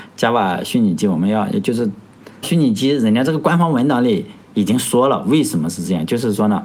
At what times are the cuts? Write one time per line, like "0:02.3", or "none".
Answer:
0:02.4